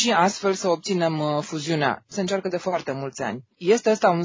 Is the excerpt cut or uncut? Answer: uncut